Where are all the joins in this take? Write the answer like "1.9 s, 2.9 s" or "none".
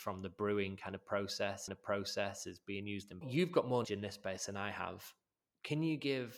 1.7 s, 3.2 s, 3.8 s

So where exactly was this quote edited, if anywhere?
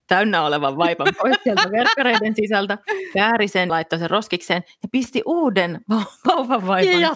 3.7 s

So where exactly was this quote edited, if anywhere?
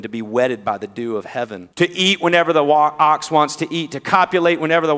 1.7 s

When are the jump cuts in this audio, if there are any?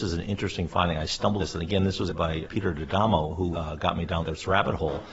1.4 s, 2.1 s, 2.4 s, 3.5 s, 4.2 s

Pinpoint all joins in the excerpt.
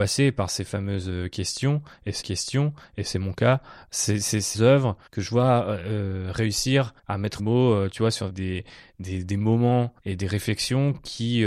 2.2 s, 4.5 s, 5.1 s, 7.0 s, 7.4 s, 8.3 s, 10.0 s

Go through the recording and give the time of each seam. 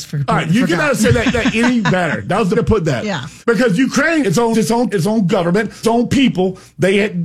1.3 s, 2.5 s, 3.4 s, 4.2 s, 4.5 s, 4.9 s, 5.8 s

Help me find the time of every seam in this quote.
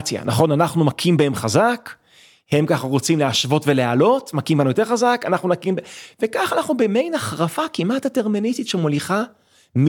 none

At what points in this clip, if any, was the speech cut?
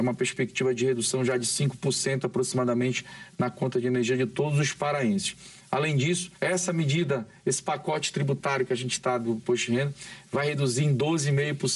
6.3 s

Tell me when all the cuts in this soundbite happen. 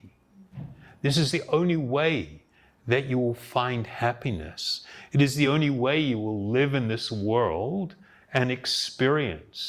none

